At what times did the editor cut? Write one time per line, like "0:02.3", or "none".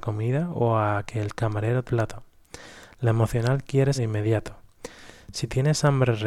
0:01.8
0:03.9